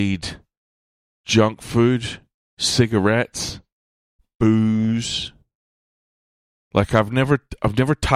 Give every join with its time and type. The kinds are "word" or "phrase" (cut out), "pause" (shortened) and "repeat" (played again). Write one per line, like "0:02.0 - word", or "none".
0:02.4 - pause